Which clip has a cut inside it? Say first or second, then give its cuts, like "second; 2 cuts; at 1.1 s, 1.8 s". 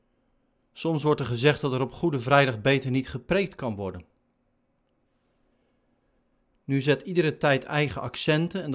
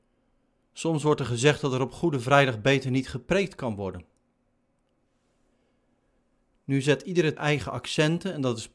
second; 1 cut; at 7.4 s